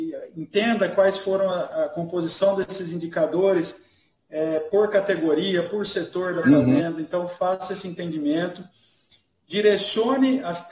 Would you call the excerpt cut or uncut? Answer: uncut